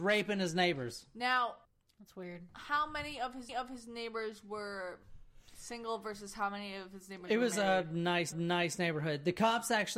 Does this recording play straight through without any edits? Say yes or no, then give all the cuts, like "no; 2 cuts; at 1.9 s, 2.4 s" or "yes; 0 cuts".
no; 3 cuts; at 1.6 s, 3.5 s, 8.3 s